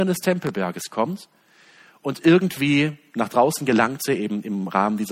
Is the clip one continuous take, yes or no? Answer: yes